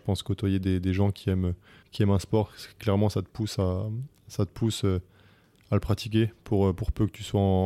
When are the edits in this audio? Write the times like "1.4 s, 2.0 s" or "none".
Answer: 1.8 s